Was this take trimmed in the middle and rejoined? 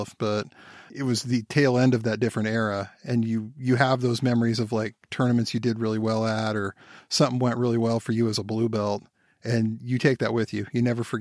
no; 0 cuts

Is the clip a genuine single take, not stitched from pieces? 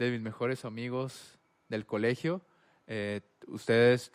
yes; 0 cuts

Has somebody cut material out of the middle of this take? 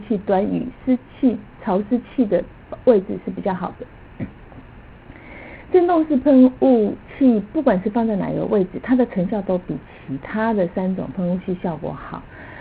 yes; 2 cuts; at 1.5 s, 7.1 s

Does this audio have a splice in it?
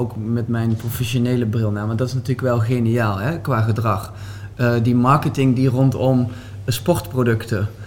no; 0 cuts

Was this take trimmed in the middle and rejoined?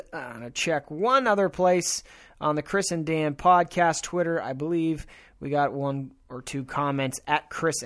no; 0 cuts

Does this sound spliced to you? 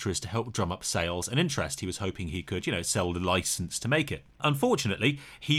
yes; 1 cut; at 4.3 s

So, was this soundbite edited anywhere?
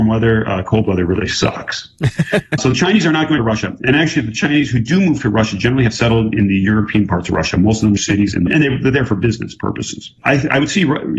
yes; 5 cuts; at 2.6 s, 3.4 s, 8.0 s, 8.5 s, 10.2 s

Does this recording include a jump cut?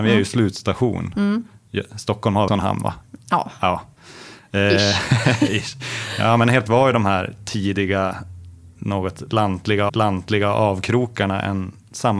yes; 3 cuts; at 2.5 s, 6.7 s, 9.9 s

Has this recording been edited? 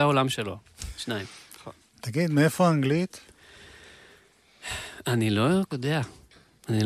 yes; 1 cut; at 5.7 s

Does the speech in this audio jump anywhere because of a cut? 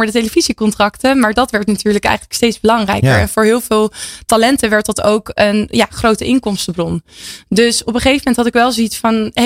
no; 0 cuts

